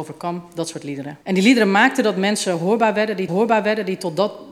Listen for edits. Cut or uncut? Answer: cut